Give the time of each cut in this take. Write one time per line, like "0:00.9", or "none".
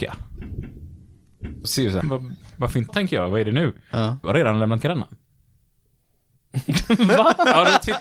0:01.6
0:02.0
0:02.9
0:04.2
0:04.8